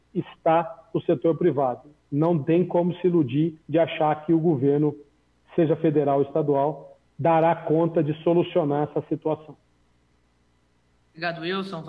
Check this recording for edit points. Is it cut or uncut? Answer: cut